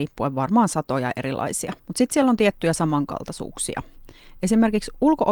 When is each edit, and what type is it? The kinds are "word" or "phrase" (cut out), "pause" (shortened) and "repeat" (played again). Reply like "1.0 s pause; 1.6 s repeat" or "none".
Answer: 1.8 s pause